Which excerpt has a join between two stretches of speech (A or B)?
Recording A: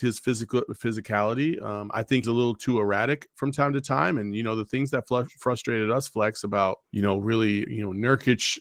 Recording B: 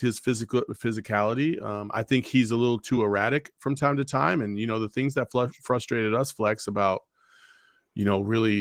A